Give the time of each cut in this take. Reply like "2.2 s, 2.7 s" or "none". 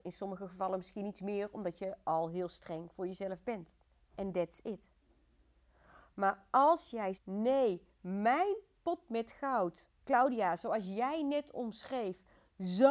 3.9 s, 7.1 s, 10.0 s